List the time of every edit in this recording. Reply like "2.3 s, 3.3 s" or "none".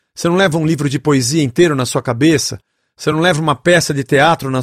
none